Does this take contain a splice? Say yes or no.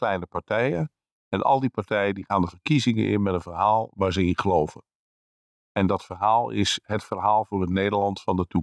no